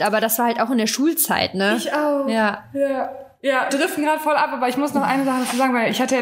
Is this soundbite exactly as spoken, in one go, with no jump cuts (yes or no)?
no